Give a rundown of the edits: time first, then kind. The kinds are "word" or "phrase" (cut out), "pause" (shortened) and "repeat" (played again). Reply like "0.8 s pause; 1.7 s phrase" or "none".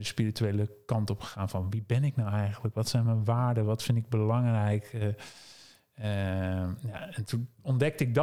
none